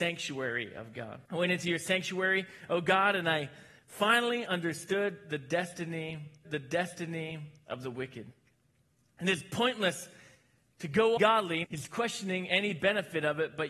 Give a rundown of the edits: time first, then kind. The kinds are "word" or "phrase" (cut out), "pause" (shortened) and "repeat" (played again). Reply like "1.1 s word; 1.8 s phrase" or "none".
1.3 s pause; 6.4 s repeat; 11.2 s phrase; 11.6 s word